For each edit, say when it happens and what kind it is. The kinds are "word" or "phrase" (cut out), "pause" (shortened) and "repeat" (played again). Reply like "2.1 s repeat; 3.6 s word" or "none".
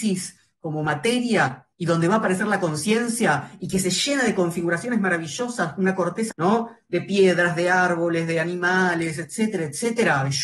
1.7 s pause; 6.3 s word